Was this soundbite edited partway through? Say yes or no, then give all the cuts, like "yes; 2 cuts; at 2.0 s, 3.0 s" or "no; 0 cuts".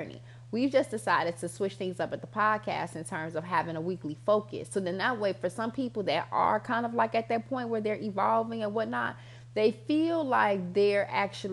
no; 0 cuts